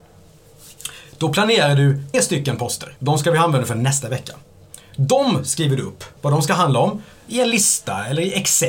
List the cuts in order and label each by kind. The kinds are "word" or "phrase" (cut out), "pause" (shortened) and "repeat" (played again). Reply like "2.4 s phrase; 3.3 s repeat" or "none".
2.1 s word; 3.0 s pause; 6.2 s pause